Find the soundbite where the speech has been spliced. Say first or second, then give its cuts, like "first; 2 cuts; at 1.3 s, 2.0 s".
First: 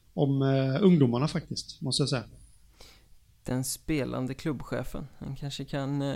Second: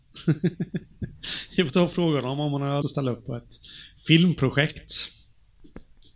second; 1 cut; at 2.8 s